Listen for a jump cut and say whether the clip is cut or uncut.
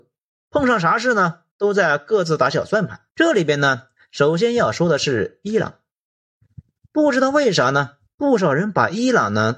cut